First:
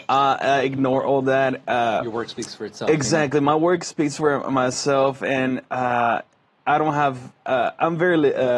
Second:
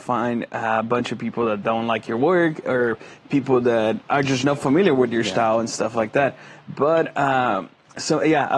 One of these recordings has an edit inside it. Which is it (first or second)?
second